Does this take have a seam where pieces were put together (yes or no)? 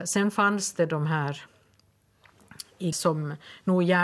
yes